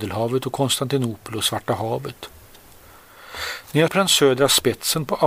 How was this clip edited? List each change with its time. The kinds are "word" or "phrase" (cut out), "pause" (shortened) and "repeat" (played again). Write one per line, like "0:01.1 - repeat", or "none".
0:03.9 - word